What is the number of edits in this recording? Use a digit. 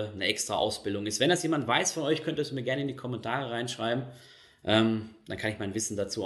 0